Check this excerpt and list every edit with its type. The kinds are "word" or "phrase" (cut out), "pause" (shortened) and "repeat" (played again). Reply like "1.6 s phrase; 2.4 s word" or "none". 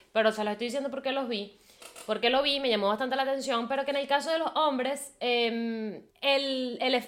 6.1 s pause